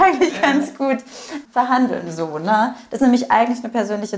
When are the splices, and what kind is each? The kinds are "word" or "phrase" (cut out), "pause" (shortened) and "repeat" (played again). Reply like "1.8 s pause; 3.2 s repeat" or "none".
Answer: 1.4 s word; 3.0 s word